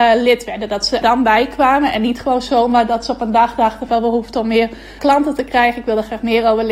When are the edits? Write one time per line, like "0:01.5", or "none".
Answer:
0:01.0
0:03.9
0:05.0